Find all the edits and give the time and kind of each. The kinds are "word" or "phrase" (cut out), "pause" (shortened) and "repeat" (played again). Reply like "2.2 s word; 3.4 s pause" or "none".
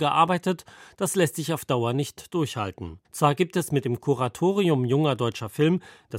3.0 s pause